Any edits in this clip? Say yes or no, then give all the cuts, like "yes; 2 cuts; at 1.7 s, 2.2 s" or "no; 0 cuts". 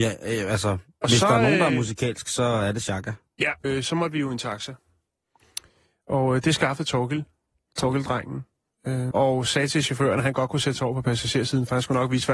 yes; 2 cuts; at 3.6 s, 9.1 s